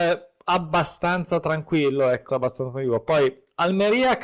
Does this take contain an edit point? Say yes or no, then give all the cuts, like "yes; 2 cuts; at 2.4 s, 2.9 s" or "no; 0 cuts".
yes; 1 cut; at 2.3 s